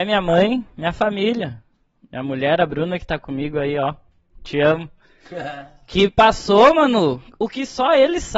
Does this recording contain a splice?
no; 0 cuts

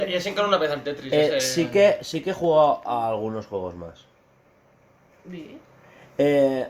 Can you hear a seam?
no; 0 cuts

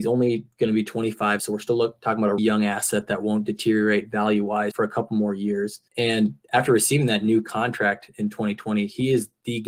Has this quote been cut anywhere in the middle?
yes; 4 cuts; at 1.4 s, 2.4 s, 4.7 s, 5.9 s

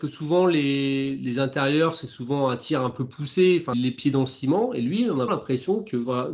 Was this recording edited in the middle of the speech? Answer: yes; 2 cuts; at 3.7 s, 5.3 s

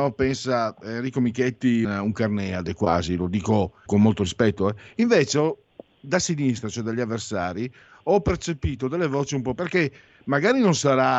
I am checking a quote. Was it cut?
yes; 3 cuts; at 1.8 s, 3.9 s, 9.6 s

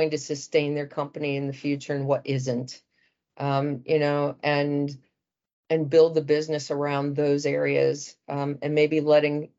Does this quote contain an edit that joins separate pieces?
no; 0 cuts

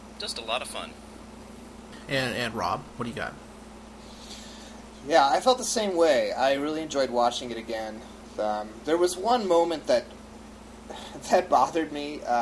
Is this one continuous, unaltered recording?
yes; 0 cuts

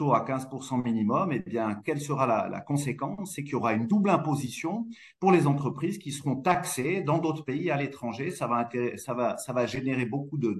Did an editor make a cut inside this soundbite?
no; 0 cuts

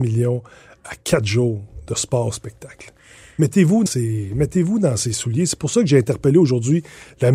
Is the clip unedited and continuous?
no; 1 cut; at 3.9 s

